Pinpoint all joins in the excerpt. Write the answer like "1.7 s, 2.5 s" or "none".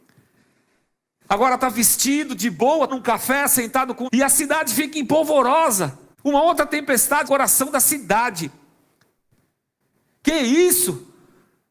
2.9 s, 4.0 s, 6.1 s, 7.2 s